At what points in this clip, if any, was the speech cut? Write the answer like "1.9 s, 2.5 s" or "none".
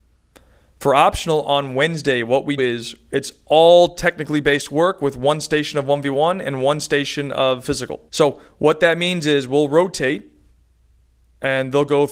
2.6 s, 8.1 s